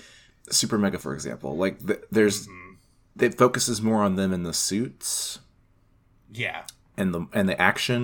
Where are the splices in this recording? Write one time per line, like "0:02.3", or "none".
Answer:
0:01.0